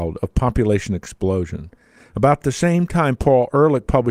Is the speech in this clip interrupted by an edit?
no; 0 cuts

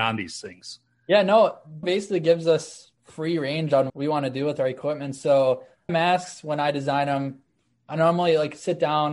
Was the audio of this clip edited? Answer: yes; 4 cuts; at 1.8 s, 2.9 s, 3.9 s, 5.9 s

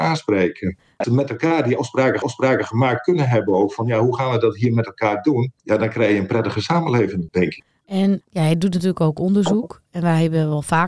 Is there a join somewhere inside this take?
yes; 3 cuts; at 1.0 s, 2.2 s, 5.6 s

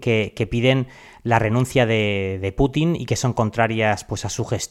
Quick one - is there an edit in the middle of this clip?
no; 0 cuts

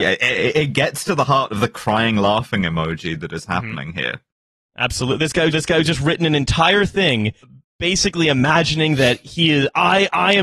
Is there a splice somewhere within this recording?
yes; 2 cuts; at 5.5 s, 7.4 s

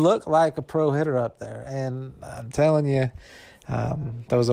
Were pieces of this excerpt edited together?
no; 0 cuts

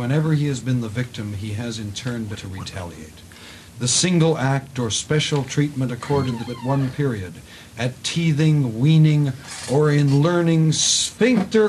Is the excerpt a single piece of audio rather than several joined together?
no; 2 cuts; at 2.3 s, 6.5 s

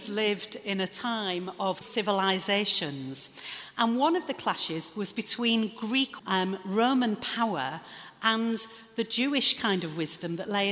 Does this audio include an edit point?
yes; 2 cuts; at 1.8 s, 6.2 s

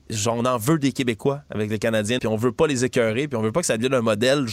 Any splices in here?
yes; 1 cut; at 2.2 s

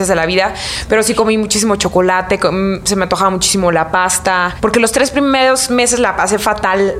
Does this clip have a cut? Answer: no; 0 cuts

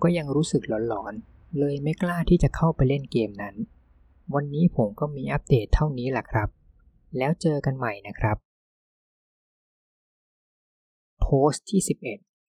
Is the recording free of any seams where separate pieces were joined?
yes; 0 cuts

